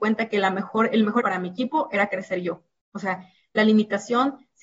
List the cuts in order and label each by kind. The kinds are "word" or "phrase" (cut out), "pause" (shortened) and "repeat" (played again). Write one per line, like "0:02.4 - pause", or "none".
0:01.2 - word